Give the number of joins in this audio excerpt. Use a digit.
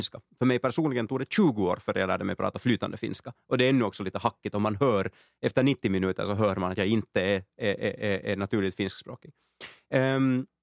0